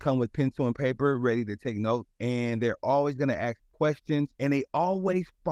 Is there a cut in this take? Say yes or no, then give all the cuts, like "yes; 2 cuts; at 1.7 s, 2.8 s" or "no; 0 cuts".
yes; 1 cut; at 4.3 s